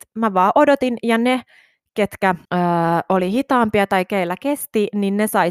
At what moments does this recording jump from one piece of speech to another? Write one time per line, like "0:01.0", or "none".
0:02.4